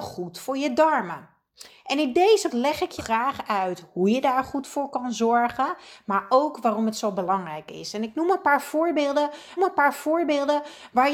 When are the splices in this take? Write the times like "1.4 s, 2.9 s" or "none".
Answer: 2.5 s, 3.0 s, 9.6 s